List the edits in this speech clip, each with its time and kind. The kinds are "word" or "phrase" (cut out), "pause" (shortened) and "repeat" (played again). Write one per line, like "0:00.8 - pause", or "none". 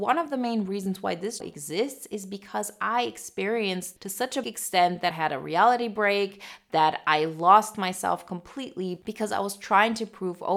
0:01.4 - word
0:04.0 - word
0:04.4 - word
0:05.1 - word

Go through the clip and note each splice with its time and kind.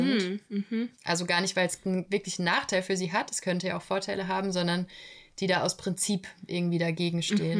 0:00.9 - pause

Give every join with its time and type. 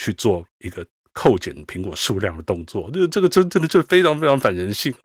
none

